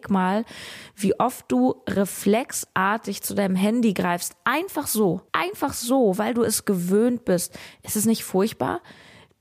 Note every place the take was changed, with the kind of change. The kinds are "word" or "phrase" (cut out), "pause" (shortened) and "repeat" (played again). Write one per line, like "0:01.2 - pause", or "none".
0:05.3 - pause